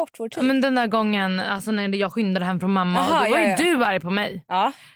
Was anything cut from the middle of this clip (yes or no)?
no